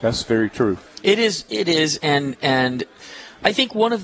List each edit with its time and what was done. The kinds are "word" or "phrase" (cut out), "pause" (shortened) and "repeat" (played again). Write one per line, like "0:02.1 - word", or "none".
none